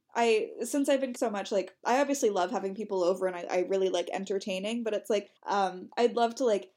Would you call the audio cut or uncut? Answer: cut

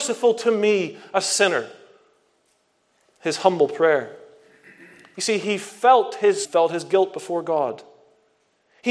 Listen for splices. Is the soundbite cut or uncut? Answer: cut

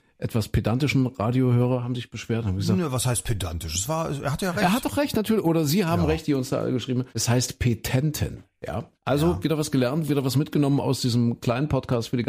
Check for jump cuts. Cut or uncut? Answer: cut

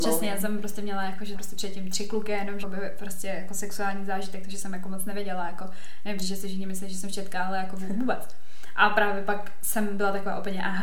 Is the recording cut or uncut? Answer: cut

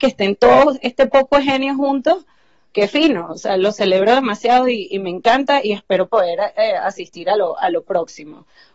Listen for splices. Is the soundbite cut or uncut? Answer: uncut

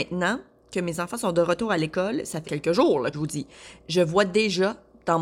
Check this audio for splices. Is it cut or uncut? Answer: cut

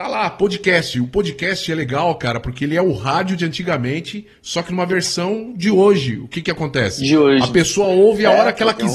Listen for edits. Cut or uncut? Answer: uncut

